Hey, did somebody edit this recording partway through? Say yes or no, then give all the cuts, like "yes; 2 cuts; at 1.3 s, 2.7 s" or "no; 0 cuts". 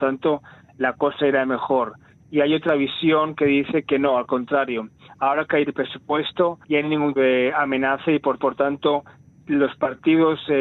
yes; 3 cuts; at 6.6 s, 7.2 s, 8.4 s